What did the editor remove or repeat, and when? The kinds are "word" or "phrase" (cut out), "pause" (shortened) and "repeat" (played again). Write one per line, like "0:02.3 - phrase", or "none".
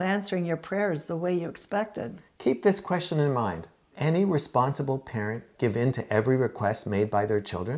0:03.9 - word